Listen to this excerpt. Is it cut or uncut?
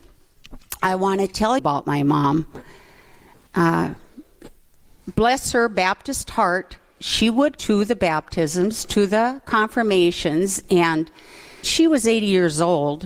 cut